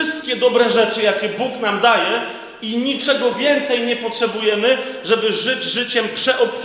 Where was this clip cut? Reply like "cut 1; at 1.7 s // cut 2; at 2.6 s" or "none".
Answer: none